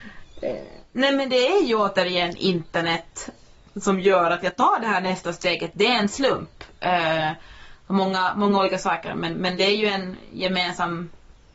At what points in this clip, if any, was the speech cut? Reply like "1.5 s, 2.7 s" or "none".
none